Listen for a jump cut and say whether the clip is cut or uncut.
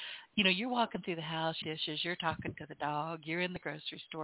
cut